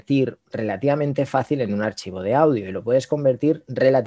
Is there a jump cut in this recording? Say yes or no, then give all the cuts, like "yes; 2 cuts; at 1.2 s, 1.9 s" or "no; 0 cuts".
no; 0 cuts